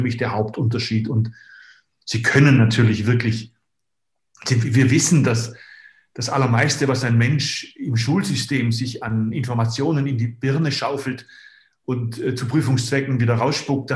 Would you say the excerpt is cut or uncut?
uncut